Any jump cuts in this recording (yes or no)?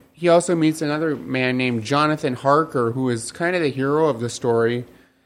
no